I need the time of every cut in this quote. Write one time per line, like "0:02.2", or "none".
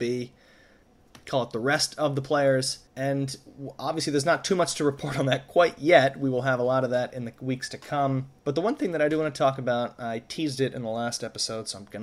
0:02.9
0:08.4